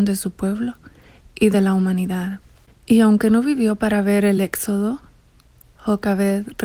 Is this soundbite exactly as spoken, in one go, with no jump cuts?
yes; 0 cuts

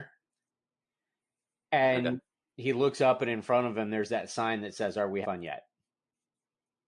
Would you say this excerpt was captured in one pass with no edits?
no; 1 cut; at 5.2 s

